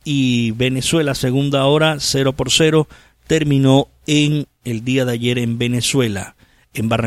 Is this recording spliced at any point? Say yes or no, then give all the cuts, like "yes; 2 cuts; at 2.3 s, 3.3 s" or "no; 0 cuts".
no; 0 cuts